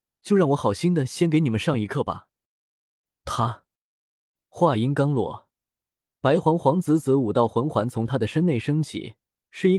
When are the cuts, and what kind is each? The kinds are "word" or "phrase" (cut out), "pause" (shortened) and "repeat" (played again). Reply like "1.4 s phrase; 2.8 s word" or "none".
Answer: none